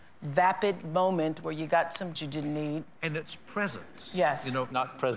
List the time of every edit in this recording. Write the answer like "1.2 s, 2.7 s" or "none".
2.1 s

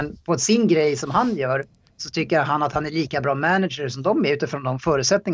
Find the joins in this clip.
none

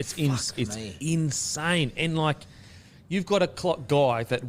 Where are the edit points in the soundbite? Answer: none

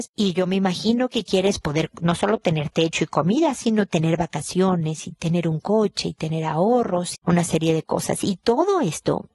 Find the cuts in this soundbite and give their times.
7.1 s

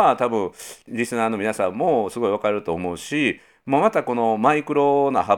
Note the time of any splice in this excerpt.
none

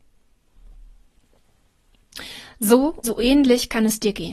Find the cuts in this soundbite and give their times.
3.0 s

